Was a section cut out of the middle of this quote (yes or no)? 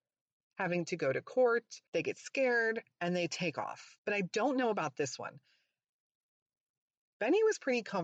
yes